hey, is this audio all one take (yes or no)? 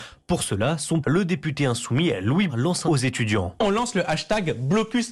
no